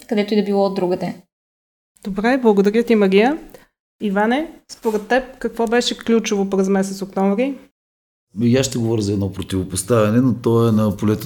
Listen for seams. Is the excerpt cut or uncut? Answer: uncut